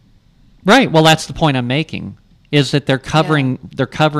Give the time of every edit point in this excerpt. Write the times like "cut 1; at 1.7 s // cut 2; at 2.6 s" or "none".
none